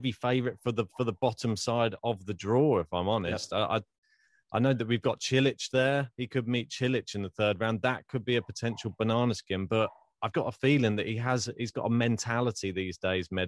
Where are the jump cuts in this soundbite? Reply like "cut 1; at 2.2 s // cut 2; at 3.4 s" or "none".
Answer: cut 1; at 10.3 s

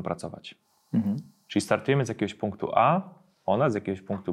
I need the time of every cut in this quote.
none

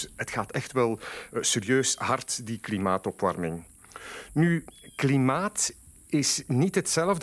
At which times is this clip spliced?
none

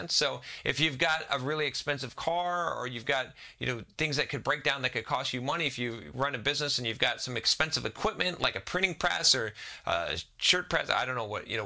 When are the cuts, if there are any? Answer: none

